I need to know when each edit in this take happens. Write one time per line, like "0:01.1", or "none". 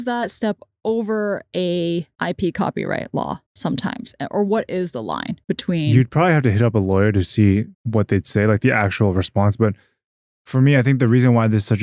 0:02.1
0:03.5
0:05.4
0:07.7